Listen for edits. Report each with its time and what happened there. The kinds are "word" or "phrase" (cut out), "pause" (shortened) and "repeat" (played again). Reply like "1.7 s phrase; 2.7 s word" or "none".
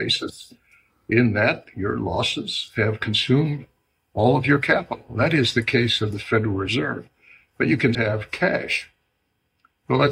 7.9 s word